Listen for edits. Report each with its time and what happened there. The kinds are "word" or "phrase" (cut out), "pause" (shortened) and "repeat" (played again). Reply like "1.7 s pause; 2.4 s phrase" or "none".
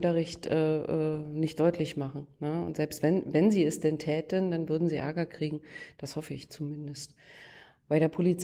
none